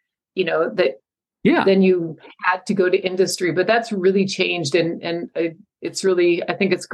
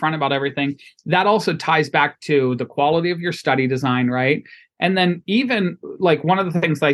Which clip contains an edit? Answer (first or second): first